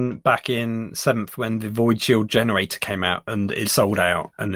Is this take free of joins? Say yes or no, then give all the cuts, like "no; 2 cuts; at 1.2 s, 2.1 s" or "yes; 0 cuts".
no; 1 cut; at 3.6 s